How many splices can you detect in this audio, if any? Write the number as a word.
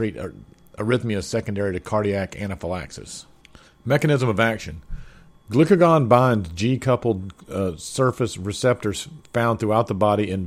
zero